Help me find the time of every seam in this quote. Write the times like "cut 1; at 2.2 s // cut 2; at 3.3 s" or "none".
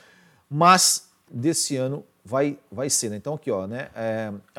cut 1; at 1.3 s